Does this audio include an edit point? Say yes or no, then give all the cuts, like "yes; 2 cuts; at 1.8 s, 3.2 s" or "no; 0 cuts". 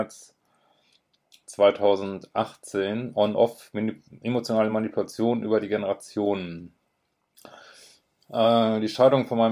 no; 0 cuts